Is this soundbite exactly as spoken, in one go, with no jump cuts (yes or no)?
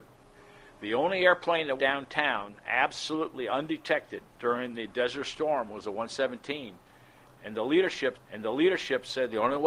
no